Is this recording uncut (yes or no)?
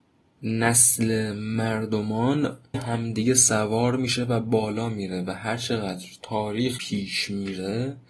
no